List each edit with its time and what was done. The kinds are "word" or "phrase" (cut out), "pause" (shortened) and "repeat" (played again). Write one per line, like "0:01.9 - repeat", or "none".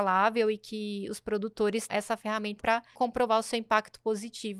0:01.9 - word
0:02.6 - word
0:02.9 - word